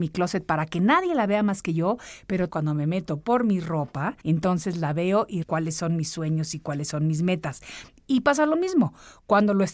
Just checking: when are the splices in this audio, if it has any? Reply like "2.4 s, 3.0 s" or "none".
2.5 s, 4.2 s, 5.4 s